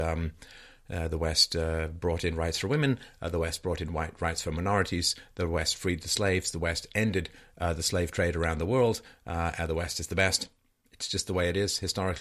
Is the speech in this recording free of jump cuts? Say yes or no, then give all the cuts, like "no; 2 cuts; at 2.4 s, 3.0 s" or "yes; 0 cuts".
yes; 0 cuts